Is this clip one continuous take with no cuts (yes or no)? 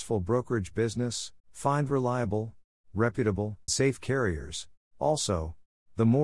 no